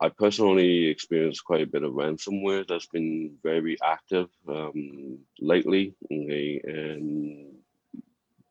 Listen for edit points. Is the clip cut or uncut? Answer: cut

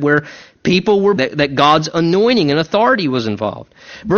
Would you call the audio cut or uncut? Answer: cut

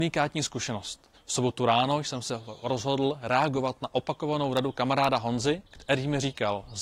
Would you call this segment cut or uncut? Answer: cut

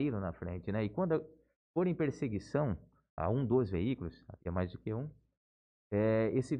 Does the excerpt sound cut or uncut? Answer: cut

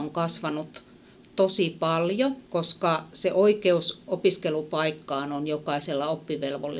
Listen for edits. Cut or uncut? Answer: cut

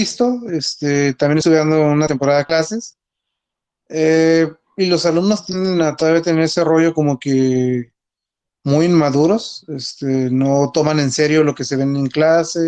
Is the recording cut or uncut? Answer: uncut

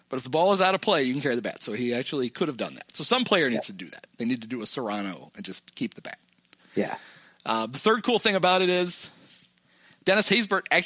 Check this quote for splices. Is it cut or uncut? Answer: uncut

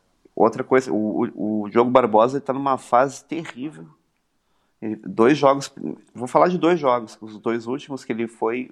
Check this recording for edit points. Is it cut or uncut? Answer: uncut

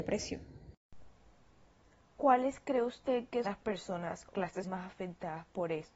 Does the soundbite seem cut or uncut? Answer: cut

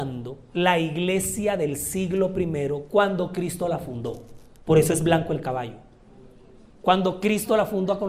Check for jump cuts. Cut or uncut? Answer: uncut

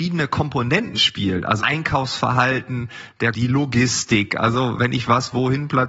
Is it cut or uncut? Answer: cut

